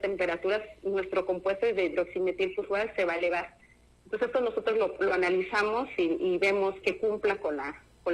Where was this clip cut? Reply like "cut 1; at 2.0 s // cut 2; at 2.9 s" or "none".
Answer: cut 1; at 6.8 s